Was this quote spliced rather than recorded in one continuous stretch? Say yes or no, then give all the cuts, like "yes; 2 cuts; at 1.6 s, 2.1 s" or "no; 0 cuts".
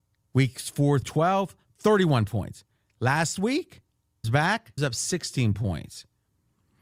yes; 3 cuts; at 1.0 s, 4.2 s, 4.8 s